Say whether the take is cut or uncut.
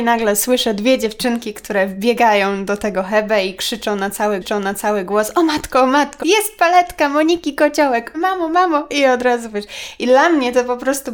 cut